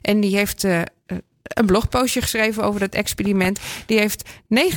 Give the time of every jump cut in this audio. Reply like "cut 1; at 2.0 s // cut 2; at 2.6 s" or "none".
none